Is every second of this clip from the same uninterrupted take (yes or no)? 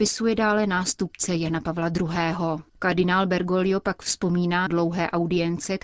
no